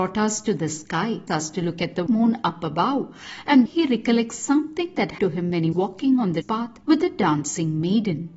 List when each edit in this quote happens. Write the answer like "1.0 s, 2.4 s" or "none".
1.3 s, 2.1 s, 3.7 s, 5.2 s, 5.7 s, 6.4 s, 6.8 s